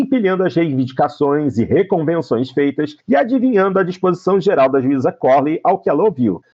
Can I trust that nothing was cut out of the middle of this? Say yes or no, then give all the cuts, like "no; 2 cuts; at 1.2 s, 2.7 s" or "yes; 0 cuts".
no; 1 cut; at 3.0 s